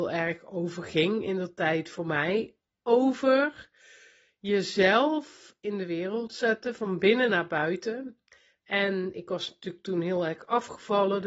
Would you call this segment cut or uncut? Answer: uncut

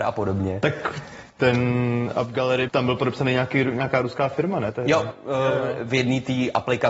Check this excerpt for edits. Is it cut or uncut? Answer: cut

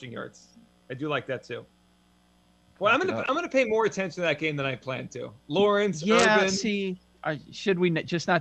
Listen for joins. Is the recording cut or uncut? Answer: uncut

